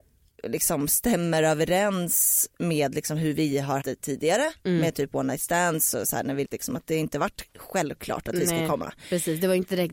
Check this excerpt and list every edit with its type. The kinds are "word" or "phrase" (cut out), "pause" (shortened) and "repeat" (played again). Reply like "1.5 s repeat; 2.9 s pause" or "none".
3.8 s word; 6.4 s word